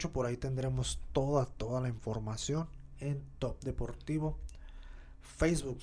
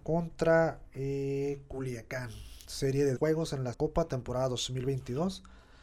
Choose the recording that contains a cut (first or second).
second